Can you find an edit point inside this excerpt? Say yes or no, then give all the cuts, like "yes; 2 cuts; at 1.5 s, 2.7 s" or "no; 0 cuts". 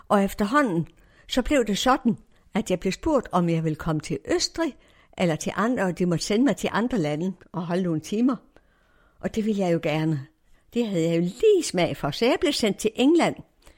no; 0 cuts